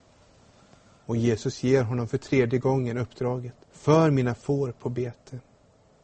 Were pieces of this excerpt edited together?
yes; 1 cut; at 3.6 s

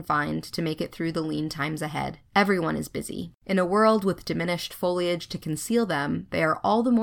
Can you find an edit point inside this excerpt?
yes; 2 cuts; at 2.3 s, 3.4 s

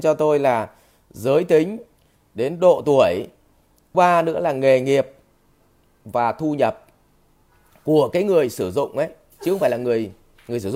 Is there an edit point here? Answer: yes; 1 cut; at 3.9 s

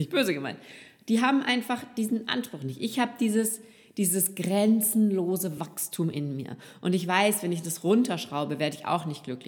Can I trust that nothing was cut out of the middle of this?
yes; 0 cuts

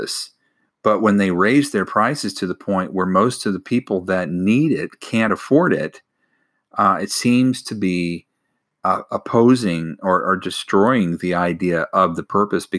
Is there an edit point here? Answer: no; 0 cuts

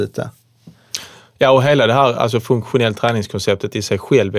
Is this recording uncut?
yes; 0 cuts

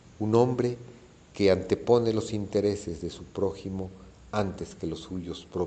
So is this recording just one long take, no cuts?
yes; 0 cuts

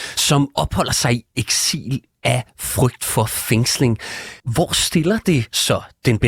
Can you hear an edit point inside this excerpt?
yes; 1 cut; at 4.4 s

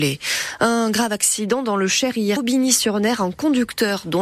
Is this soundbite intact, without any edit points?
no; 1 cut; at 2.4 s

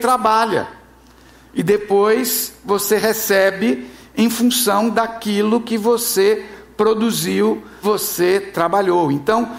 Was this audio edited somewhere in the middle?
yes; 1 cut; at 7.8 s

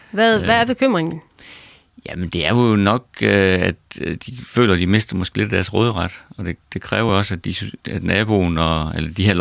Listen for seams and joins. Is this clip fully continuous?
yes; 0 cuts

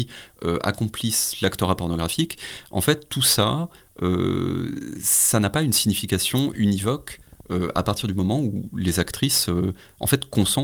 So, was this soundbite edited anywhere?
no; 0 cuts

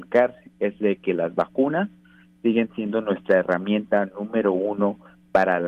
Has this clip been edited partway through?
no; 0 cuts

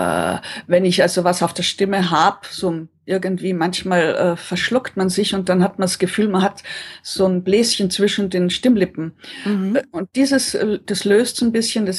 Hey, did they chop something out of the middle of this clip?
no; 0 cuts

